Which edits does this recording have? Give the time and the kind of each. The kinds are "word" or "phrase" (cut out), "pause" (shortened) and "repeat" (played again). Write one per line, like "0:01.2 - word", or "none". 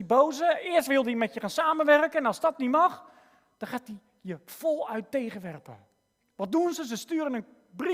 none